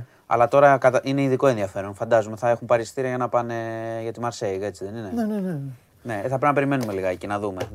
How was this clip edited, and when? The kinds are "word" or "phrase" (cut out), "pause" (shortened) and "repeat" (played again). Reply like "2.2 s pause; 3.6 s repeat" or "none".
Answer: none